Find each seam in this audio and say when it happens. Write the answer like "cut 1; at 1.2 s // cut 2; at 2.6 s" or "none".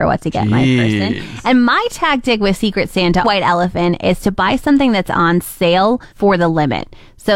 cut 1; at 3.2 s // cut 2; at 6.1 s

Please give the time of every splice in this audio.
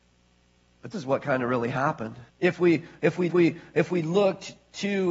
cut 1; at 0.9 s // cut 2; at 2.3 s // cut 3; at 3.3 s

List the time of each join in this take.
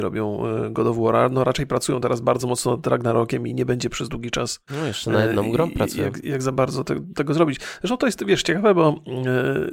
none

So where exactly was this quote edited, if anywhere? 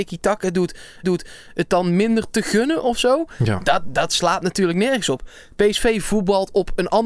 cut 1; at 1.0 s

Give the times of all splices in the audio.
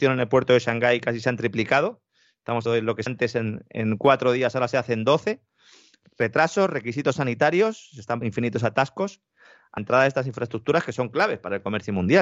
cut 1; at 2.7 s // cut 2; at 3.1 s // cut 3; at 8.2 s // cut 4; at 9.8 s

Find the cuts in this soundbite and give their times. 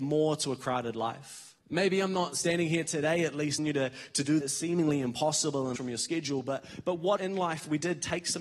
cut 1; at 1.6 s // cut 2; at 3.6 s // cut 3; at 4.4 s // cut 4; at 5.8 s // cut 5; at 7.2 s

